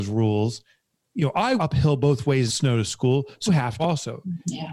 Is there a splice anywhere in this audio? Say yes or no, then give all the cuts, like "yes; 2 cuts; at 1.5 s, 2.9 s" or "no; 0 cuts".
yes; 4 cuts; at 1.6 s, 2.5 s, 3.5 s, 3.8 s